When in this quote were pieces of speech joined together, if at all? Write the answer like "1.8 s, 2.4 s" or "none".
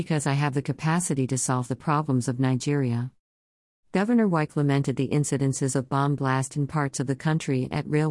none